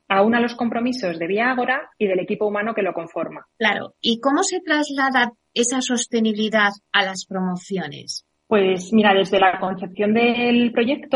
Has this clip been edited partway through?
yes; 2 cuts; at 3.5 s, 8.4 s

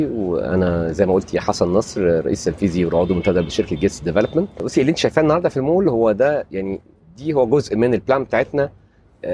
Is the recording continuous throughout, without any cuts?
yes; 0 cuts

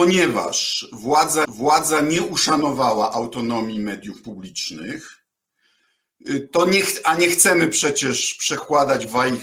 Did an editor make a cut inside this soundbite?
yes; 1 cut; at 1.4 s

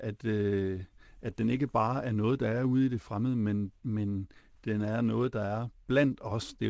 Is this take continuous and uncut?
no; 1 cut; at 3.8 s

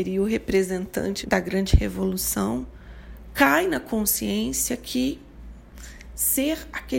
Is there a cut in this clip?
yes; 1 cut; at 1.2 s

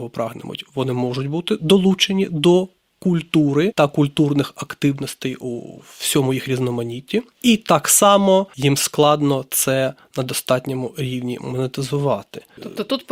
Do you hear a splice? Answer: no; 0 cuts

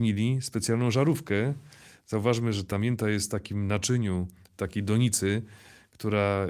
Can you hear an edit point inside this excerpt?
no; 0 cuts

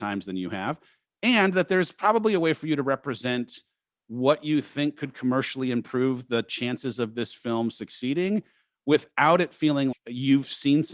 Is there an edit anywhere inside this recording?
yes; 1 cut; at 9.9 s

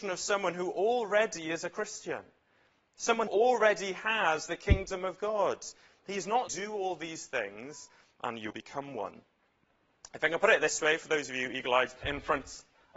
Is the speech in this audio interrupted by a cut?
yes; 4 cuts; at 3.3 s, 6.5 s, 8.5 s, 12.0 s

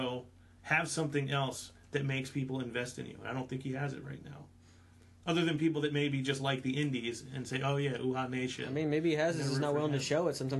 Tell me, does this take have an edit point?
no; 0 cuts

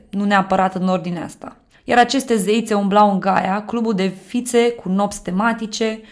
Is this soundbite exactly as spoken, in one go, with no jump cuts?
no; 1 cut; at 1.7 s

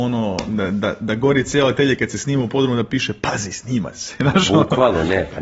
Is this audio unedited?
yes; 0 cuts

